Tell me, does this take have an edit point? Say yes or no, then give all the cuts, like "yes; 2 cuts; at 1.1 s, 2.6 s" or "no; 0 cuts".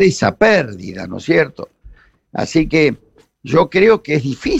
no; 0 cuts